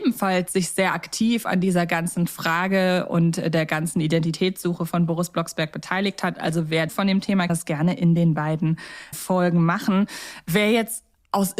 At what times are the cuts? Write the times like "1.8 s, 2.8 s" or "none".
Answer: 6.9 s, 7.5 s, 9.1 s